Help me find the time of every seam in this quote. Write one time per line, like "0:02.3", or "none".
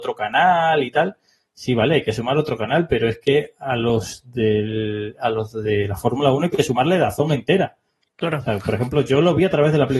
none